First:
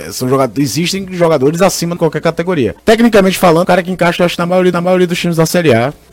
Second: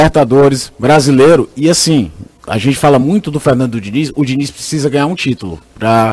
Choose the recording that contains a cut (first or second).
first